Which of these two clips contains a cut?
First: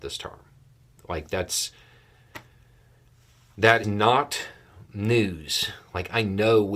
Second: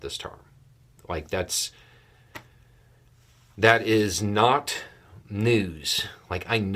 first; 1 cut; at 3.8 s

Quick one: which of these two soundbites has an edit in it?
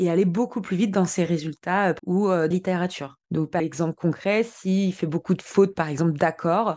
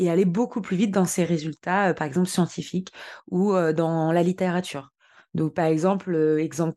first; 4 cuts; at 2.0 s, 2.5 s, 3.2 s, 3.6 s

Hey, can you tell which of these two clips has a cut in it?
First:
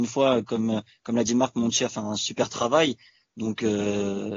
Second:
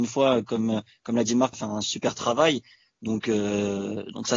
second; 1 cut; at 1.5 s

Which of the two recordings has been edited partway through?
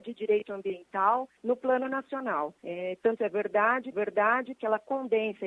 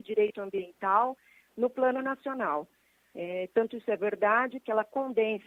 first; 4 cuts; at 1.4 s, 2.6 s, 3.2 s, 3.9 s

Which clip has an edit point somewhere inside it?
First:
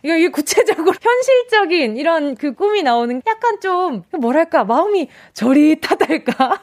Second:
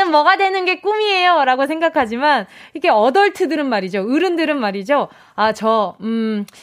first; 4 cuts; at 1.0 s, 2.5 s, 3.2 s, 4.1 s

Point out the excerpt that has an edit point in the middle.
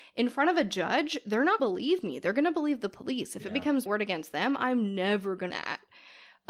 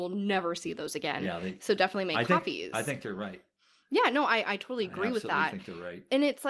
first; 3 cuts; at 1.6 s, 3.9 s, 5.5 s

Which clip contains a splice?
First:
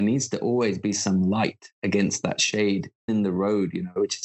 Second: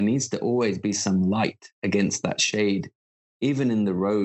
first; 1 cut; at 3.1 s

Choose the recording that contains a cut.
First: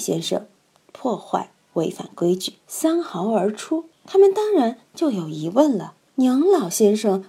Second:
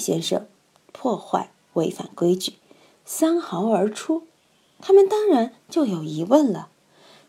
first; 3 cuts; at 2.6 s, 3.9 s, 6.1 s

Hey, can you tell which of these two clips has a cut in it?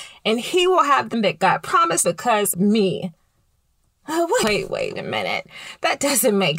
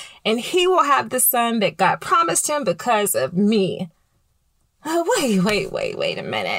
first; 5 cuts; at 1.1 s, 2.0 s, 2.5 s, 4.4 s, 5.0 s

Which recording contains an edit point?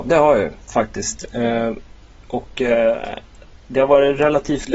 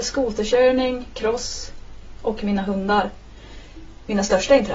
first; 1 cut; at 3.6 s

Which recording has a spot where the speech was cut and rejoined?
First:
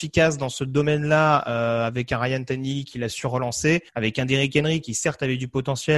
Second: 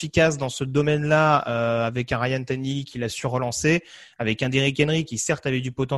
first; 1 cut; at 3.9 s

